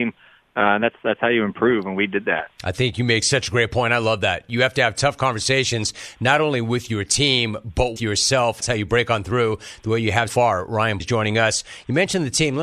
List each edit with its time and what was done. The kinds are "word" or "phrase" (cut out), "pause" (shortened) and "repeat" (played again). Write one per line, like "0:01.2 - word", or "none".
0:08.0 - word
0:08.6 - word
0:10.3 - word
0:11.0 - word